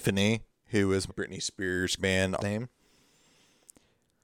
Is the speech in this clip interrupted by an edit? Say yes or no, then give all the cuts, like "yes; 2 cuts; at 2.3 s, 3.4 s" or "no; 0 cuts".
yes; 3 cuts; at 1.1 s, 2.0 s, 2.4 s